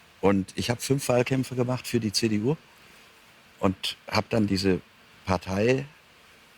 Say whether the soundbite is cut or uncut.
uncut